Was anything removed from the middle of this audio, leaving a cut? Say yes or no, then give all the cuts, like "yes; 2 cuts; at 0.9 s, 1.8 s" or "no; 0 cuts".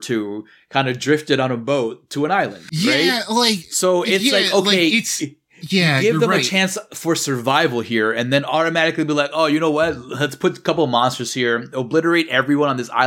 no; 0 cuts